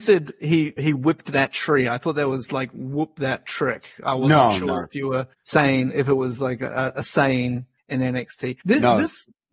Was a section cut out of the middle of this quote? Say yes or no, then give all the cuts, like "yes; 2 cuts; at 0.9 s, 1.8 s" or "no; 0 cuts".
yes; 3 cuts; at 5.3 s, 7.8 s, 8.6 s